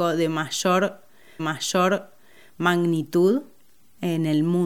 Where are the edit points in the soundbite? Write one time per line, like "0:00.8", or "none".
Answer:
0:01.4